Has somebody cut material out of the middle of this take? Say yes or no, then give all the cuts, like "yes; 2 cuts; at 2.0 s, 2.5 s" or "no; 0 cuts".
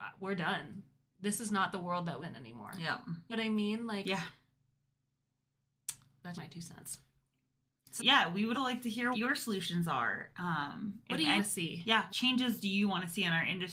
yes; 8 cuts; at 2.2 s, 3.3 s, 6.3 s, 8.0 s, 8.5 s, 9.1 s, 11.4 s, 12.1 s